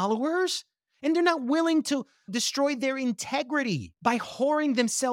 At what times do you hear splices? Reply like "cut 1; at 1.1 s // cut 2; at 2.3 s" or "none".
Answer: cut 1; at 4.0 s